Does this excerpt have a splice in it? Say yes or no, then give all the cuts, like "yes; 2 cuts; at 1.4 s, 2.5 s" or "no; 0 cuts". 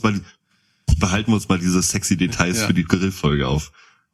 no; 0 cuts